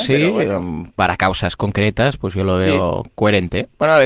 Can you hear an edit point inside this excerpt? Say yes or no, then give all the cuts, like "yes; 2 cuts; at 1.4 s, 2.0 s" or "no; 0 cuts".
no; 0 cuts